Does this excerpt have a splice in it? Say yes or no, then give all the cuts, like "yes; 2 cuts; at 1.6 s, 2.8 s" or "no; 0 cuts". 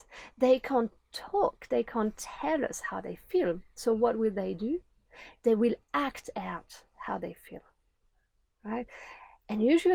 no; 0 cuts